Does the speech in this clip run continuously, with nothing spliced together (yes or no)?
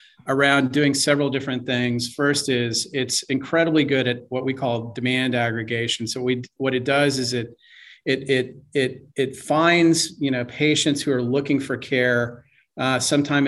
no